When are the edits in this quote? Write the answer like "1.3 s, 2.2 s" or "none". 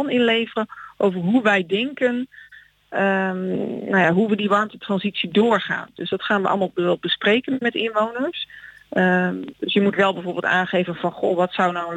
none